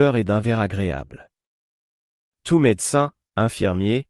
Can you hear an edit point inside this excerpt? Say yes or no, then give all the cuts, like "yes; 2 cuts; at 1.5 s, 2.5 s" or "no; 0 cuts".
no; 0 cuts